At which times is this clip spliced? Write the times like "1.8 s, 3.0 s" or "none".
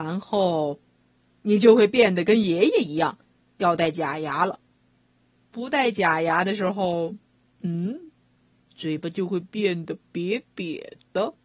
none